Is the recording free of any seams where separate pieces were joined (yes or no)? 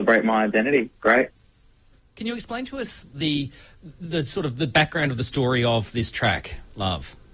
yes